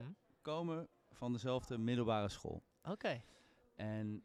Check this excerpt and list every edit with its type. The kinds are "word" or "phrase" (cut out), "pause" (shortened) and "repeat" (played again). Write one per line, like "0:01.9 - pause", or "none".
0:00.9 - pause